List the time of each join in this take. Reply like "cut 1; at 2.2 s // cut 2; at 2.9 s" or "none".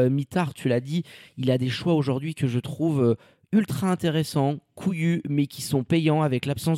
none